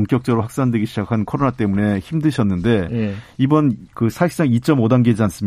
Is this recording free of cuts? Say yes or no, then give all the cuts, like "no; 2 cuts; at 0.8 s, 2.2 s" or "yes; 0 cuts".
yes; 0 cuts